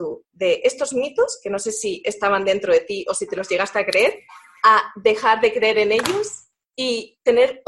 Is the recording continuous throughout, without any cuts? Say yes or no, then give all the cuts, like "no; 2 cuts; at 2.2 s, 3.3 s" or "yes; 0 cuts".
yes; 0 cuts